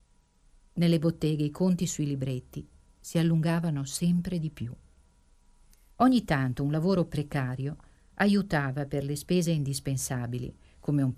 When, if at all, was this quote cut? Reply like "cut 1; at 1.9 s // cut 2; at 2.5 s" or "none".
none

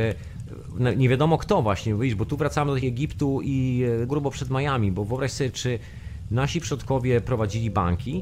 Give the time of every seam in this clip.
cut 1; at 2.8 s // cut 2; at 4.1 s

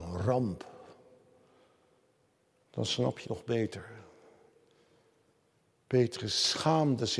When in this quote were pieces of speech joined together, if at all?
cut 1; at 3.2 s

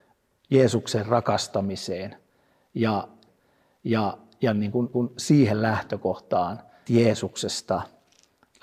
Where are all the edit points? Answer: cut 1; at 3.3 s // cut 2; at 4.9 s // cut 3; at 6.9 s

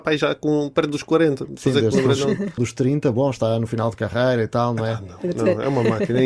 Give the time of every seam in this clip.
cut 1; at 2.6 s

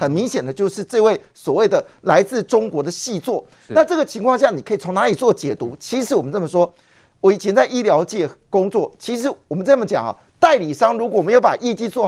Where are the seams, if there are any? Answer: none

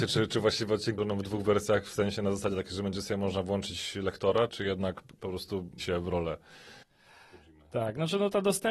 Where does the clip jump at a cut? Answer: cut 1; at 1.0 s // cut 2; at 4.5 s // cut 3; at 5.2 s // cut 4; at 5.8 s

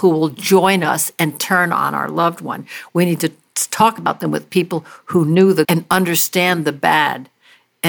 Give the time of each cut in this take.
cut 1; at 5.6 s

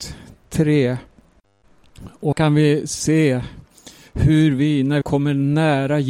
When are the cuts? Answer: cut 1; at 2.3 s // cut 2; at 5.0 s

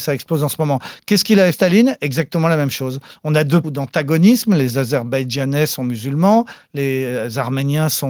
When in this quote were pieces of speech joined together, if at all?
cut 1; at 1.5 s // cut 2; at 3.6 s

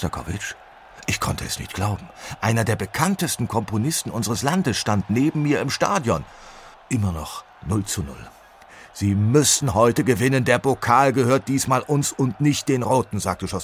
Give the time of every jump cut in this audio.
cut 1; at 6.7 s

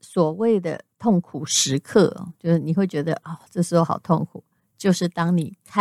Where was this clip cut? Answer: cut 1; at 0.9 s

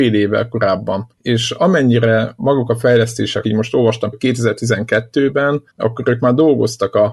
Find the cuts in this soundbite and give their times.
cut 1; at 1.1 s // cut 2; at 2.4 s // cut 3; at 3.4 s // cut 4; at 4.1 s // cut 5; at 5.7 s

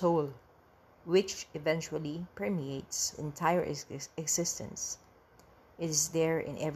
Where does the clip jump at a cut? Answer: cut 1; at 3.1 s

